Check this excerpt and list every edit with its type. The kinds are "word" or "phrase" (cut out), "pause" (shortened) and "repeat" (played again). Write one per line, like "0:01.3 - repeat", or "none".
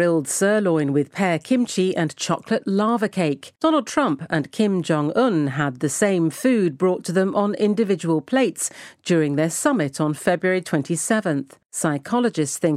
0:03.6 - pause
0:11.6 - pause